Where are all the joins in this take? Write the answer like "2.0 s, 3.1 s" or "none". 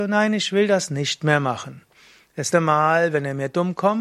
2.5 s